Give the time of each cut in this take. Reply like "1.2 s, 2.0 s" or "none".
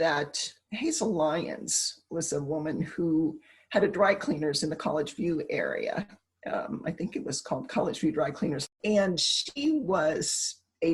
none